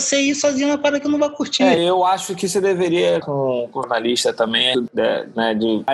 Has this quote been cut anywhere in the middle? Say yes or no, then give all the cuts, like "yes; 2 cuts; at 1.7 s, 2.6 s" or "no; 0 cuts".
yes; 4 cuts; at 1.8 s, 3.2 s, 3.8 s, 4.7 s